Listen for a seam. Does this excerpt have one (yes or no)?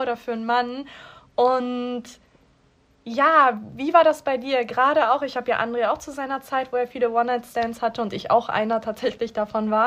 no